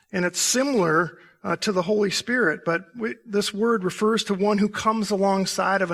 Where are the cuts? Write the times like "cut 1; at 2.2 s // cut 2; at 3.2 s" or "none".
none